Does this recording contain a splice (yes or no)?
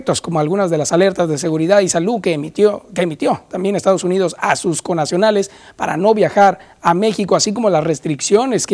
no